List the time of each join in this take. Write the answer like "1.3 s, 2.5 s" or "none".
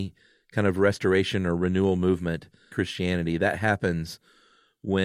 2.7 s

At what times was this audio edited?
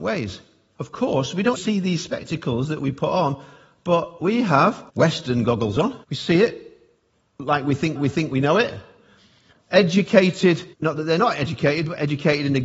1.6 s, 4.9 s, 6.0 s, 8.0 s, 10.7 s

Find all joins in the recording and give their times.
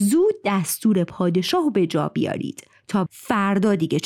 3.1 s

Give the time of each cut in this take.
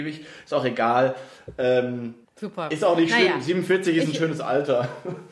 2.2 s

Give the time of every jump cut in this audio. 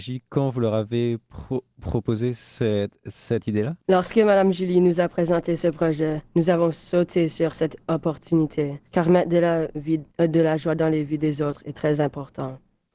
3.8 s, 8.8 s, 10.1 s

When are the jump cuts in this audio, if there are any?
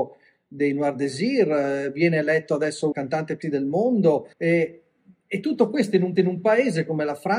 2.9 s, 3.4 s, 4.3 s, 6.2 s

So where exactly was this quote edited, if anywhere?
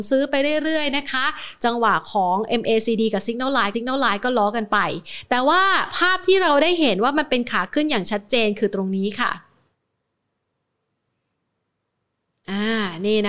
3.7 s

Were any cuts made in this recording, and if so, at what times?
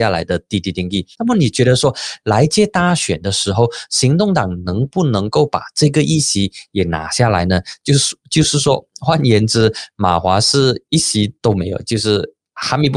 1.1 s, 11.3 s

